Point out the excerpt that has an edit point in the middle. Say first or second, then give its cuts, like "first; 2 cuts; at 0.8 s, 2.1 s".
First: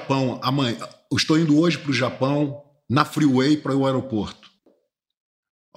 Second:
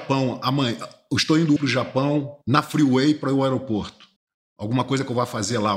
second; 3 cuts; at 1.6 s, 2.4 s, 4.2 s